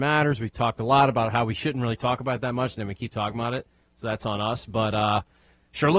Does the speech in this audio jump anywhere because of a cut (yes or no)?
no